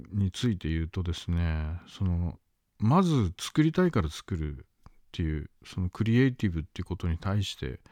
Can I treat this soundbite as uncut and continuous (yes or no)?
yes